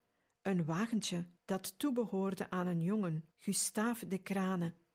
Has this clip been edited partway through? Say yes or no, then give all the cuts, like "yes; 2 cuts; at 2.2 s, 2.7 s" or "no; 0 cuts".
yes; 2 cuts; at 1.4 s, 3.3 s